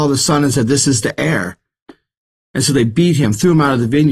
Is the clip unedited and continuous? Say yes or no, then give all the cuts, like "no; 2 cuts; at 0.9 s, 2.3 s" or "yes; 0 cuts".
yes; 0 cuts